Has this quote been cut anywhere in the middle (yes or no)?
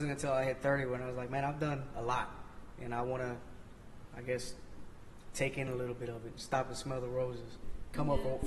no